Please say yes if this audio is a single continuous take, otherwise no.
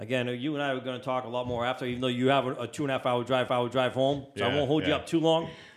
no